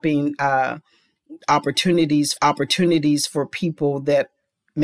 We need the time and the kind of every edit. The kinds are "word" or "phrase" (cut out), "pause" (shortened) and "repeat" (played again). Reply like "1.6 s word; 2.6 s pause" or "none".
2.4 s repeat